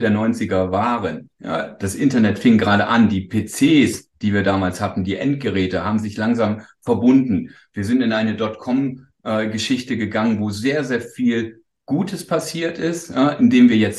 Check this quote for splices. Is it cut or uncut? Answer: uncut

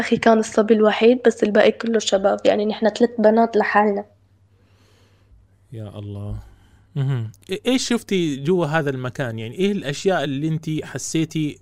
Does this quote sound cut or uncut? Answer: uncut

